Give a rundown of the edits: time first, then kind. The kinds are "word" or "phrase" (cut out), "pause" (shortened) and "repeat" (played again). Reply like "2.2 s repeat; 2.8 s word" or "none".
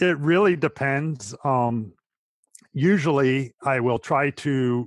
none